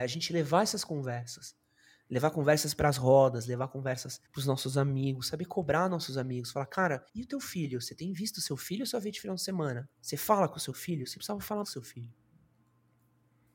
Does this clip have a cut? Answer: yes; 4 cuts; at 4.3 s, 7.1 s, 9.9 s, 11.6 s

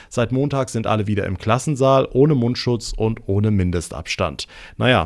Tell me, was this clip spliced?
no; 0 cuts

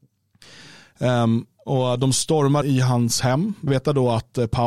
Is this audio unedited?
no; 2 cuts; at 2.6 s, 3.7 s

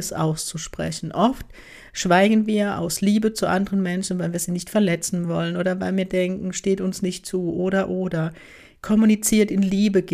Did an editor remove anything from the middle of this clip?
no; 0 cuts

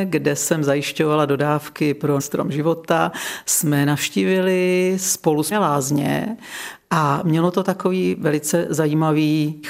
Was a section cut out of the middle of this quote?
yes; 2 cuts; at 2.2 s, 5.5 s

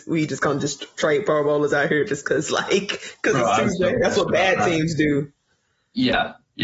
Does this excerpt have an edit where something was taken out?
no; 0 cuts

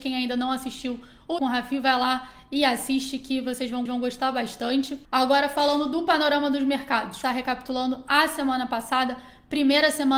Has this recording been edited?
yes; 4 cuts; at 1.4 s, 3.9 s, 5.0 s, 7.2 s

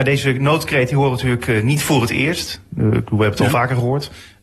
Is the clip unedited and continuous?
yes; 0 cuts

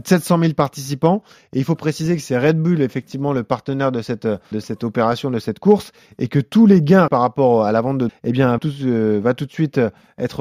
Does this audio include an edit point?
yes; 4 cuts; at 4.5 s, 7.1 s, 8.1 s, 8.6 s

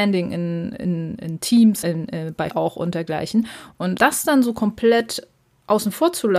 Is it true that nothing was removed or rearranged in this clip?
no; 3 cuts; at 1.8 s, 2.5 s, 4.0 s

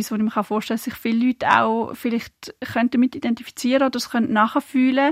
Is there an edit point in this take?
no; 0 cuts

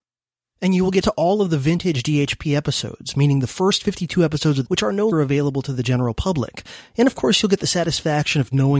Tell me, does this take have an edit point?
yes; 3 cuts; at 1.0 s, 4.7 s, 5.1 s

